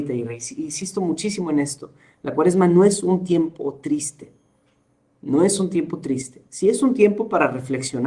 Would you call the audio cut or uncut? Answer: uncut